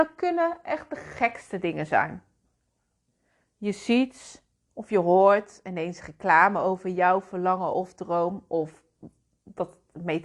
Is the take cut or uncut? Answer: uncut